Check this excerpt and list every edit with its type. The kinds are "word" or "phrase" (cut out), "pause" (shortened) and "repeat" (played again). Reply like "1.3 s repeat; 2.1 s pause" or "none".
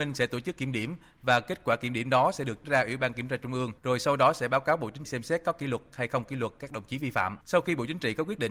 2.6 s word; 3.8 s pause; 5.0 s word; 7.4 s pause